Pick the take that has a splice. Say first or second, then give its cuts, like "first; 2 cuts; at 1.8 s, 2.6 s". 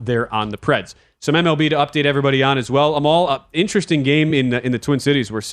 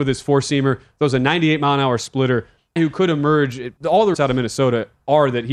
second; 3 cuts; at 2.8 s, 3.8 s, 4.1 s